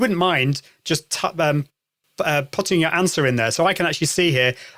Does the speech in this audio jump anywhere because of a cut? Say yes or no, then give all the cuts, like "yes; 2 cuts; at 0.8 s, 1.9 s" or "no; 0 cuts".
no; 0 cuts